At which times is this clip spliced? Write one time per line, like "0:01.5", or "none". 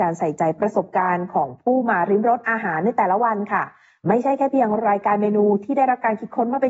none